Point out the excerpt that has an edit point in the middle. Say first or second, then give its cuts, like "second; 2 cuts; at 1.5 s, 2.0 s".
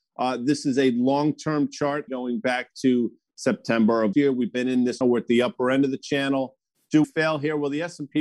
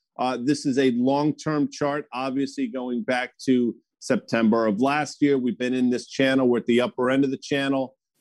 first; 4 cuts; at 2.1 s, 4.1 s, 5.0 s, 7.0 s